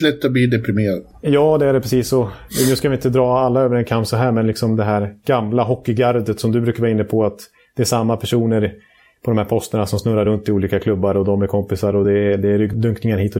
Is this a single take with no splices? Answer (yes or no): yes